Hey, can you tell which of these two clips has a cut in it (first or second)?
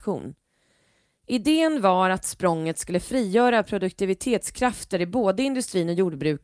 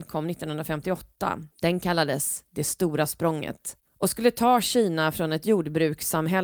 second